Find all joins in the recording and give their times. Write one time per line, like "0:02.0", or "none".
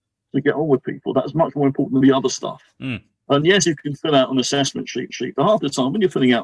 0:02.0
0:05.1

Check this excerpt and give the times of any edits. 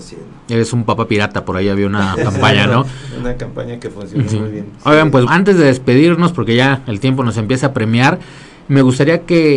0:05.3

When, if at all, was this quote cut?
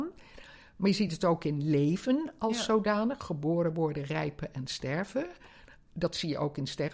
none

